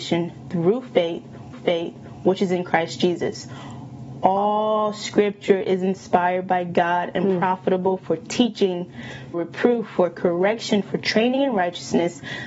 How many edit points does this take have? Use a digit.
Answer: 2